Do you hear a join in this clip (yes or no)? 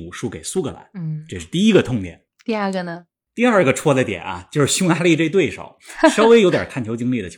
no